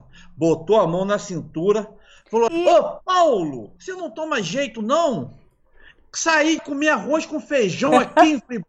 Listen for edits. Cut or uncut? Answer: cut